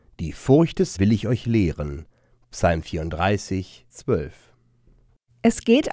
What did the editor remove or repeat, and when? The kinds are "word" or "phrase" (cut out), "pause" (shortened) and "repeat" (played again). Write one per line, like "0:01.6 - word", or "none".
0:01.0 - word
0:03.9 - word